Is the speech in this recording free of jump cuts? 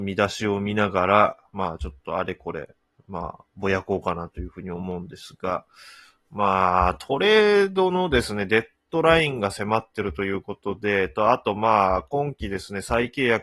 yes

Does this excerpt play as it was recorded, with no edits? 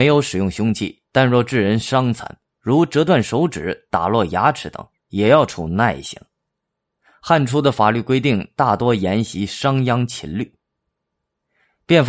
yes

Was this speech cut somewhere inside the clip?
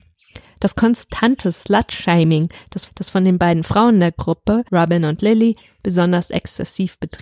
yes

